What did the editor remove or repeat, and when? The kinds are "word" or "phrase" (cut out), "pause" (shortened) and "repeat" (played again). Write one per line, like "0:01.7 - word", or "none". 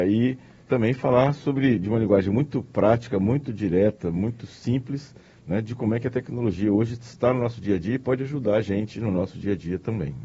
none